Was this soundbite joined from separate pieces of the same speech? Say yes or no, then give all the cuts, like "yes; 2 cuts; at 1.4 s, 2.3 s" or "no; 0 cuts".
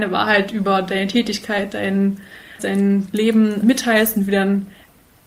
yes; 2 cuts; at 2.6 s, 3.6 s